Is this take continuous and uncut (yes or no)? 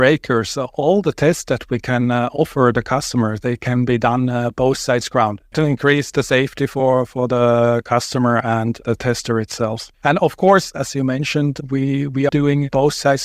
no